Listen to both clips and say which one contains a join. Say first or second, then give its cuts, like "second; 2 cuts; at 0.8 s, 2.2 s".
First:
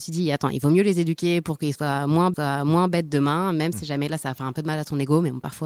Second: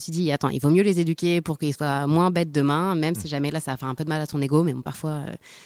first; 1 cut; at 2.3 s